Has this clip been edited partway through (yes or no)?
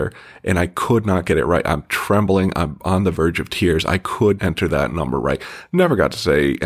yes